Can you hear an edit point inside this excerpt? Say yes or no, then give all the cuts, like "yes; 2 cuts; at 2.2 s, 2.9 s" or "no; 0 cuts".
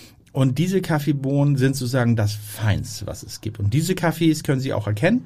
no; 0 cuts